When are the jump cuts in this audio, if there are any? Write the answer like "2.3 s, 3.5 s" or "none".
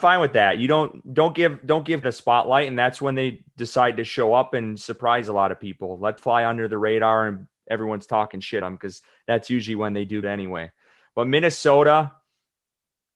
2.0 s, 6.2 s, 8.6 s, 10.2 s